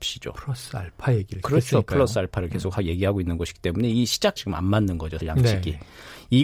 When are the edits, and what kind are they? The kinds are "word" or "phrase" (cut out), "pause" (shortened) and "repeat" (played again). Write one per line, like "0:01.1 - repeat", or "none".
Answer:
0:01.4 - word
0:04.4 - word
0:05.2 - word